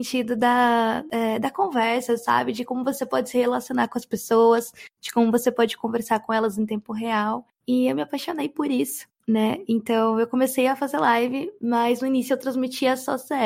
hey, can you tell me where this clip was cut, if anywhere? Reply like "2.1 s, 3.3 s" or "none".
none